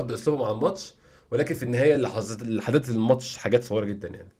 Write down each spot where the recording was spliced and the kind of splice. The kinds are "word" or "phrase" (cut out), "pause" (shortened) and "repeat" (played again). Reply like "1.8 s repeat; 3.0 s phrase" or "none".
none